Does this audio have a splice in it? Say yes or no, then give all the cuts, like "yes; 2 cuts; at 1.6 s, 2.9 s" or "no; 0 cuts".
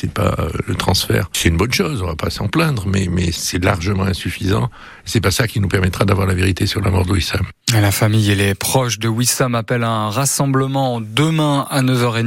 no; 0 cuts